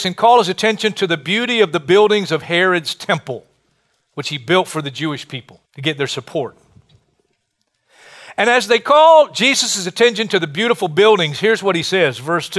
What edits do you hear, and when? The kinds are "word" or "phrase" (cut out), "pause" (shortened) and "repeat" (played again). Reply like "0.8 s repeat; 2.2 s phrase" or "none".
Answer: 5.7 s pause